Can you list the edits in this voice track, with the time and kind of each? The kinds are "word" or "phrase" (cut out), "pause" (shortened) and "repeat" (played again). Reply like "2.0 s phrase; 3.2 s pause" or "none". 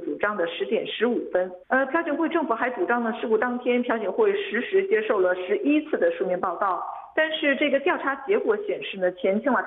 1.6 s pause